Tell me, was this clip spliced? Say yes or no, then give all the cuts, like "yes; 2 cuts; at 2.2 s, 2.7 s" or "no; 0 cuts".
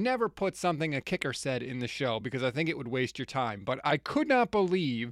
no; 0 cuts